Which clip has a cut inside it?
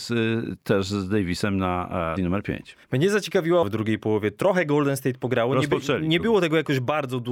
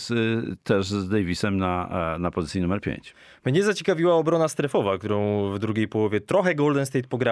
first; 3 cuts; at 2.2 s, 2.8 s, 3.6 s

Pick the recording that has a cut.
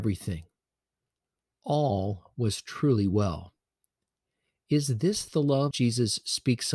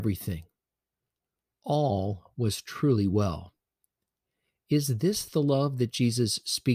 first; 1 cut; at 5.7 s

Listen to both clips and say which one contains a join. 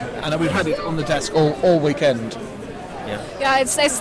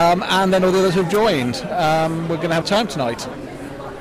second; 1 cut; at 2.6 s

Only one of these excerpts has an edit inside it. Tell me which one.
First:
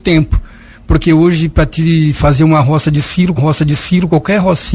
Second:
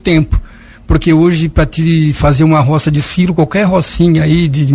first; 1 cut; at 3.4 s

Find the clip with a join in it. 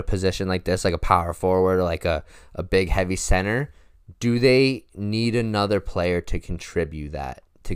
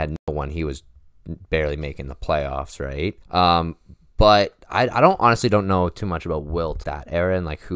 second; 2 cuts; at 3.2 s, 6.8 s

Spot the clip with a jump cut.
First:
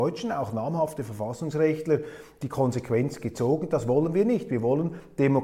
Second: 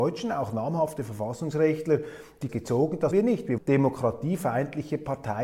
second; 3 cuts; at 2.5 s, 3.1 s, 3.6 s

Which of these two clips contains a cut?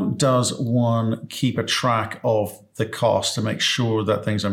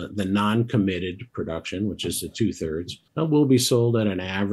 second; 1 cut; at 3.1 s

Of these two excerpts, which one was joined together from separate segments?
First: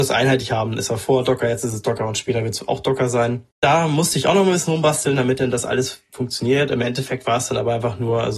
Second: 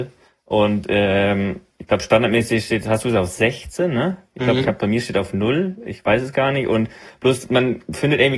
first; 1 cut; at 3.5 s

